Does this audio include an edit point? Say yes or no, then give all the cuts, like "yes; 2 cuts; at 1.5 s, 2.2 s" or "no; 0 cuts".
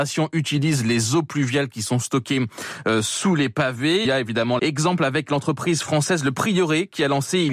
yes; 2 cuts; at 4.0 s, 4.6 s